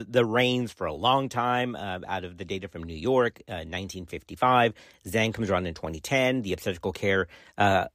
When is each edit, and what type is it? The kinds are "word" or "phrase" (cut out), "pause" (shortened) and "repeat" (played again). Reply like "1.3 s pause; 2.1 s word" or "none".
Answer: none